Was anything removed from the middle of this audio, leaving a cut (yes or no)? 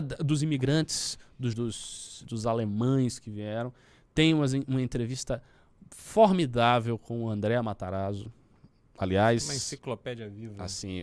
yes